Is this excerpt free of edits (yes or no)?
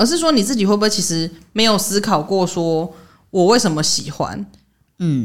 yes